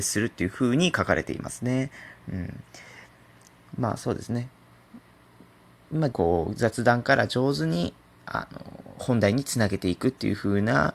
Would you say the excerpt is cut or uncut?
cut